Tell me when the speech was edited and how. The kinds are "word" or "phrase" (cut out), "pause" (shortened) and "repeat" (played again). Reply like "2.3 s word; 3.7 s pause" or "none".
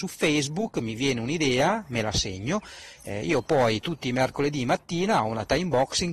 none